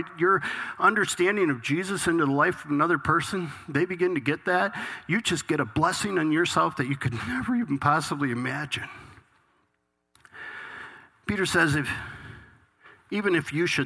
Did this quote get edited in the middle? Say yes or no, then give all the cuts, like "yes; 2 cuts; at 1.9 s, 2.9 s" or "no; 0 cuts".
no; 0 cuts